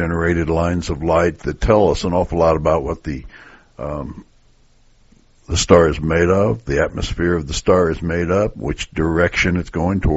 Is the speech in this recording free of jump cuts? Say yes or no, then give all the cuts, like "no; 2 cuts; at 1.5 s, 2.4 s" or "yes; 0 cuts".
yes; 0 cuts